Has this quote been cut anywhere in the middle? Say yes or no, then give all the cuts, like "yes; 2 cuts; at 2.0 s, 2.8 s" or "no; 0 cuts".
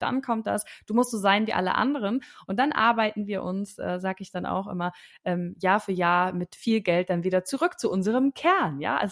no; 0 cuts